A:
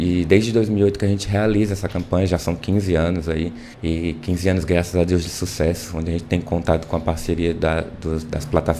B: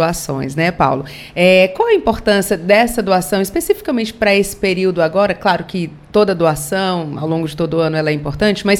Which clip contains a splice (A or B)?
A